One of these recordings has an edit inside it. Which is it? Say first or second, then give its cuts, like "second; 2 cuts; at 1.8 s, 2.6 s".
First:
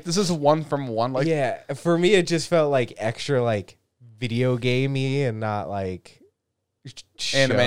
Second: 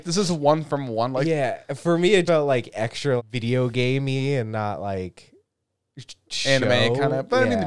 second; 2 cuts; at 2.3 s, 3.2 s